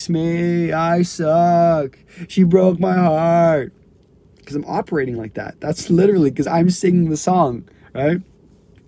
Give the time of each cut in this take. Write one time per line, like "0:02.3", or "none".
none